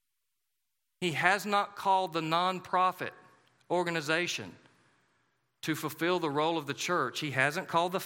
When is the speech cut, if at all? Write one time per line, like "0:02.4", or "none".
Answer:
none